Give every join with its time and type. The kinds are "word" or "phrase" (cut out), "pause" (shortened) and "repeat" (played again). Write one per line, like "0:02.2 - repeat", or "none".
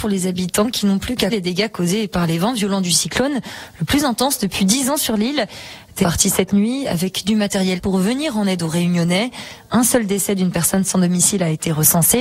0:01.3 - word
0:06.0 - phrase
0:07.8 - word